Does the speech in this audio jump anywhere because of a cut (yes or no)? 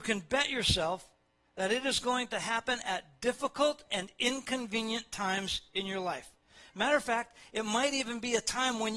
no